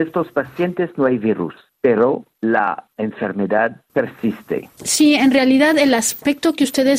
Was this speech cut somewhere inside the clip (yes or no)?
no